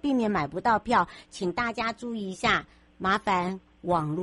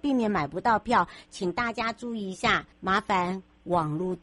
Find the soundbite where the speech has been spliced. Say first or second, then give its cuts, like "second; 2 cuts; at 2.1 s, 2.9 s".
second; 1 cut; at 2.7 s